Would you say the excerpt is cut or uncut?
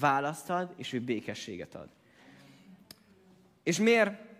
uncut